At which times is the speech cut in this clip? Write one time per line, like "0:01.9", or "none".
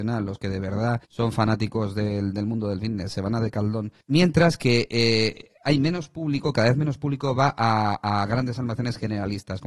0:01.0
0:04.0